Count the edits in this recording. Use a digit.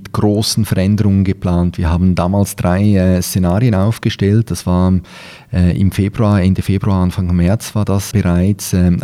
1